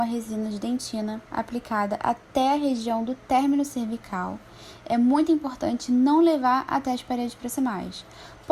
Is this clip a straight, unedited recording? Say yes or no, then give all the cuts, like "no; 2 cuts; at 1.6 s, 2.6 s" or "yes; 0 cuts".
no; 1 cut; at 1.3 s